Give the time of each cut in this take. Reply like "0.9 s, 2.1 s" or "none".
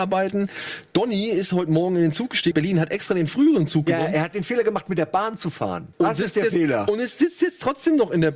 2.5 s, 5.9 s